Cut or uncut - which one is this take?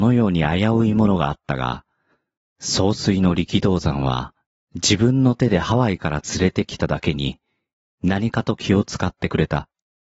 uncut